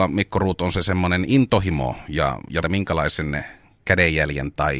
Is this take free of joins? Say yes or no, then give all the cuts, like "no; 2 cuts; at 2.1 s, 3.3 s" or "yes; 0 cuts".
no; 1 cut; at 2.6 s